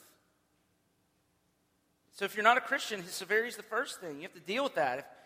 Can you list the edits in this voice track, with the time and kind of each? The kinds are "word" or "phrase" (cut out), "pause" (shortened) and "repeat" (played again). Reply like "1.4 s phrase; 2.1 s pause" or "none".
none

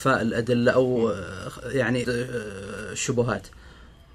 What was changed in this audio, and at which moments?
2.0 s word

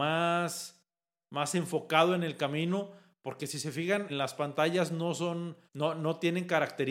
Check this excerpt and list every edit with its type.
4.1 s word; 5.7 s pause

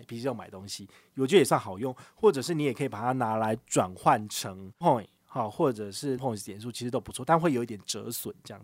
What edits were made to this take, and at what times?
4.8 s word; 6.2 s word

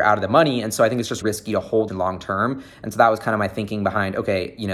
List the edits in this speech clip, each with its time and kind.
1.2 s word; 1.9 s phrase

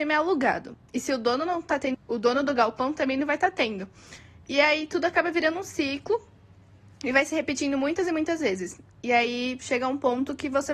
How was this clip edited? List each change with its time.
1.9 s word

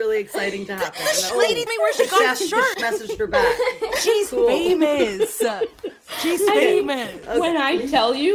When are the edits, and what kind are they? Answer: 1.3 s word; 1.7 s word; 2.7 s word

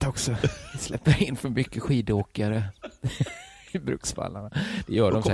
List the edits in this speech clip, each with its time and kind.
none

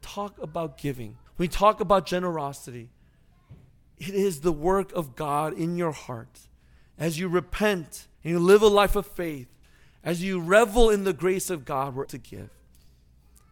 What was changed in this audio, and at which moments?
1.3 s pause; 3.7 s pause; 8.1 s pause; 12.0 s word

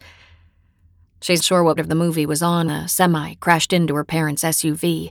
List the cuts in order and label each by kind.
1.4 s word; 1.8 s word; 2.7 s word

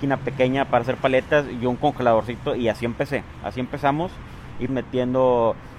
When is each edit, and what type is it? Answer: 4.7 s phrase

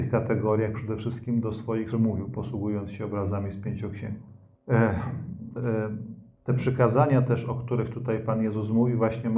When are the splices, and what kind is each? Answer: 1.9 s word; 5.6 s word

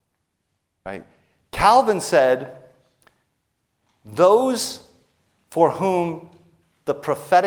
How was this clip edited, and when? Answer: none

